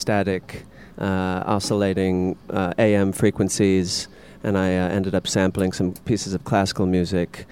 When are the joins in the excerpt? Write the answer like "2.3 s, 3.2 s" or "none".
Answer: 0.9 s